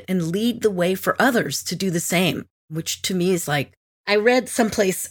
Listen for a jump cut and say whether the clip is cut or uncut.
cut